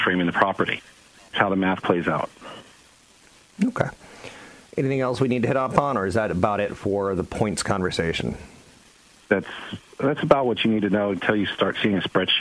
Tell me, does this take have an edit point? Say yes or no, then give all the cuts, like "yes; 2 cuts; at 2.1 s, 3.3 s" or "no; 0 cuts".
yes; 1 cut; at 1.3 s